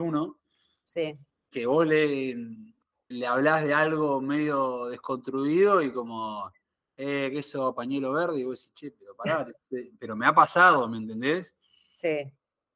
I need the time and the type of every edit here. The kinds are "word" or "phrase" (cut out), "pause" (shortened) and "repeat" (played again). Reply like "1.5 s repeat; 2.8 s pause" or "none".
3.1 s word